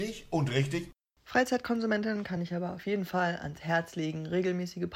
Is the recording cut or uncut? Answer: uncut